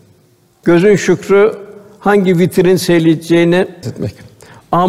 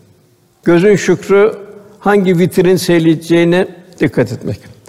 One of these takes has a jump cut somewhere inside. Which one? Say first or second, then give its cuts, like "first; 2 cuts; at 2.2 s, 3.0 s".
first; 1 cut; at 3.8 s